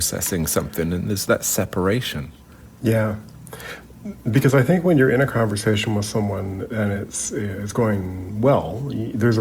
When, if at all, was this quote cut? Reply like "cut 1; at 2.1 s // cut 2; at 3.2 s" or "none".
none